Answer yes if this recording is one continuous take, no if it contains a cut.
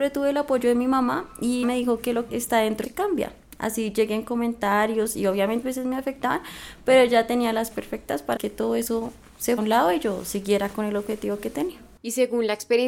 no